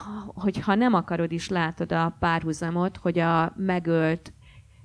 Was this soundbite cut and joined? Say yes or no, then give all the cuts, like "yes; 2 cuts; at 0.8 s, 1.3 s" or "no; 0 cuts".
no; 0 cuts